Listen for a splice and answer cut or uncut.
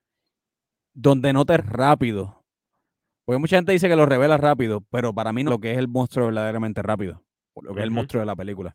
cut